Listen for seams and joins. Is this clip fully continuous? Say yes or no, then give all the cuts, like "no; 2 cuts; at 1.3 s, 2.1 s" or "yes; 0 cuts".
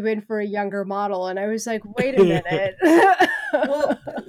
yes; 0 cuts